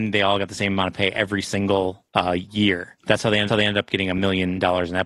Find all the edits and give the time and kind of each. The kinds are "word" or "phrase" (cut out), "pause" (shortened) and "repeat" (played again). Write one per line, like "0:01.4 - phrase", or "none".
0:02.1 - pause
0:03.0 - pause
0:03.5 - repeat